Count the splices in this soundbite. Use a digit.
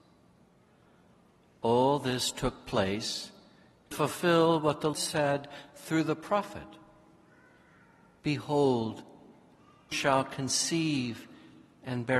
3